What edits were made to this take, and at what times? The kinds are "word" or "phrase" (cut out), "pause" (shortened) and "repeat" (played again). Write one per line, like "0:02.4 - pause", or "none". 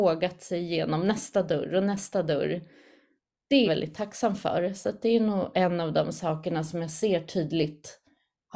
0:03.7 - word
0:05.5 - word